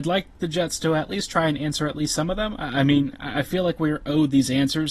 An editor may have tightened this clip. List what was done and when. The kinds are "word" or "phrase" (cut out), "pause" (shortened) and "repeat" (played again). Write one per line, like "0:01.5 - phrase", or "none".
none

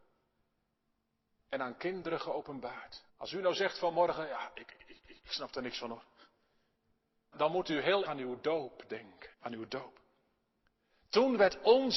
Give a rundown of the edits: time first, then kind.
0:03.1 - pause
0:05.0 - repeat
0:07.3 - word
0:08.1 - word
0:09.3 - pause

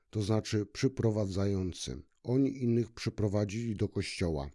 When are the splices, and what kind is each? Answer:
0:02.1 - pause

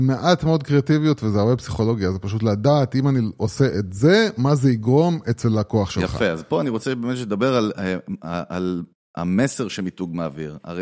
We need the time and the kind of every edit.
none

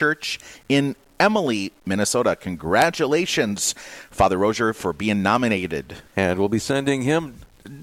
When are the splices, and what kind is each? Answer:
0:06.1 - pause

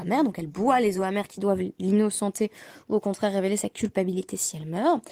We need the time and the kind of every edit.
none

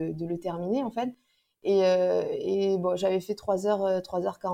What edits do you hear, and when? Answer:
none

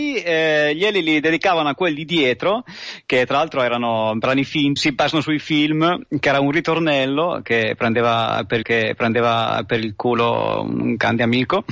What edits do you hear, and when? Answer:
0:04.8 - word
0:08.6 - repeat

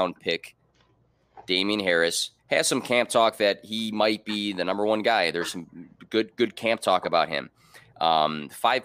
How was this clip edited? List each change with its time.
0:02.4 - pause

